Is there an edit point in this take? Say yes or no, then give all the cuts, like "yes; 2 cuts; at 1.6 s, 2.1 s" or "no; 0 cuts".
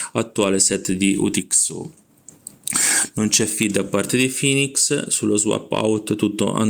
no; 0 cuts